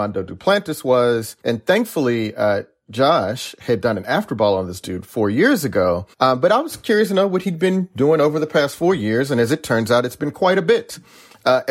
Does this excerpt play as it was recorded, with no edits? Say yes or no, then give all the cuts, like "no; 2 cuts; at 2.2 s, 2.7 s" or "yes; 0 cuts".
no; 2 cuts; at 1.4 s, 6.1 s